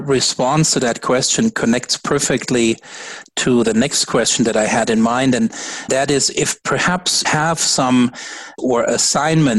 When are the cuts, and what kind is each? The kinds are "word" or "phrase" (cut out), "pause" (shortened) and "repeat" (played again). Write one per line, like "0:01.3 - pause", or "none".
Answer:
0:05.9 - word
0:07.2 - word
0:08.6 - word